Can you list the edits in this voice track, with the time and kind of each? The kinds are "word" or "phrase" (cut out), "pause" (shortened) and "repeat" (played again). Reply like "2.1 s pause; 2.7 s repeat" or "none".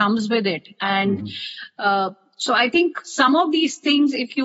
none